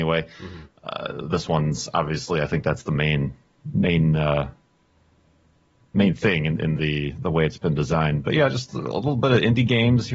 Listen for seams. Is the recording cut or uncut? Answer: uncut